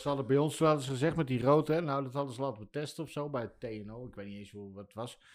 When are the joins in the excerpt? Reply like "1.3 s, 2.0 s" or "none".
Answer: none